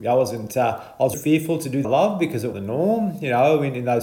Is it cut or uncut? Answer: cut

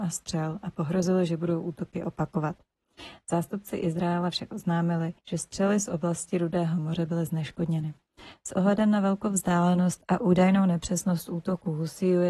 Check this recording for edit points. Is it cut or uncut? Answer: cut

